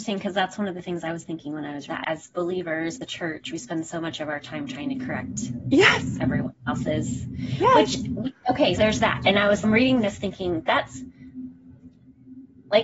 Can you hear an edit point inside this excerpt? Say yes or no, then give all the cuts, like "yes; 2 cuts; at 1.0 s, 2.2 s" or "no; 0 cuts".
yes; 4 cuts; at 1.9 s, 3.0 s, 8.8 s, 9.6 s